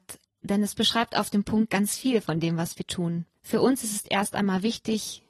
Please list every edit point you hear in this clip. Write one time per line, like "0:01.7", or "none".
0:03.4